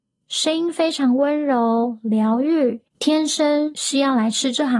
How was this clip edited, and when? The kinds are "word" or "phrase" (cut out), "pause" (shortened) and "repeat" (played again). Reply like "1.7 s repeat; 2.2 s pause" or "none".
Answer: 2.9 s pause